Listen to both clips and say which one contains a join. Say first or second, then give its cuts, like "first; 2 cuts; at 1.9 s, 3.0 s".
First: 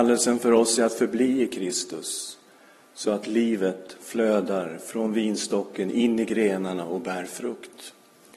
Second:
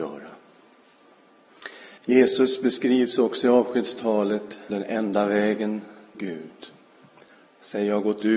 second; 3 cuts; at 2.0 s, 4.7 s, 6.1 s